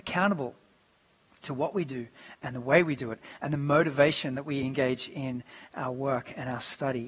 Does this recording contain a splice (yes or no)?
no